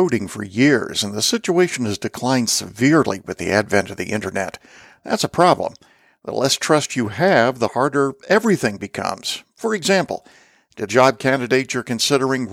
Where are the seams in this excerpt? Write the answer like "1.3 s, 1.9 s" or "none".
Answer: 10.9 s